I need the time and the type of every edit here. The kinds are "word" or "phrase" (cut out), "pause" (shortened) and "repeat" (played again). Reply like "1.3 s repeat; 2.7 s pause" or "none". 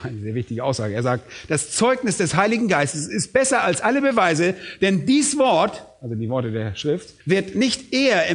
7.2 s pause